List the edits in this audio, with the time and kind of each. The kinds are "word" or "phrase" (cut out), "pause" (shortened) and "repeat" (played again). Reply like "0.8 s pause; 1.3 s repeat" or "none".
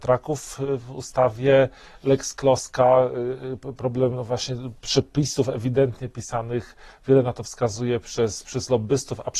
none